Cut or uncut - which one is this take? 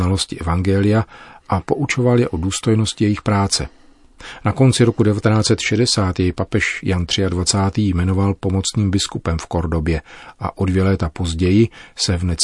uncut